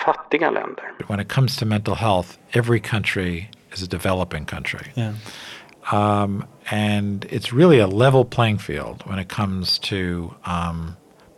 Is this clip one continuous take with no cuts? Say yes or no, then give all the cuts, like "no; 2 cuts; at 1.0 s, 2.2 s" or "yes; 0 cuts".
yes; 0 cuts